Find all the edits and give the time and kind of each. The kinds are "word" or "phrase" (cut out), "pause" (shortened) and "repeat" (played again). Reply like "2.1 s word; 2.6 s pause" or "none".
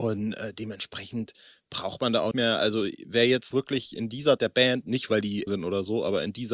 2.3 s word; 3.5 s word; 4.4 s word; 5.5 s word